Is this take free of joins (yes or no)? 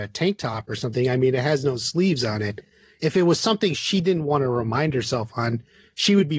yes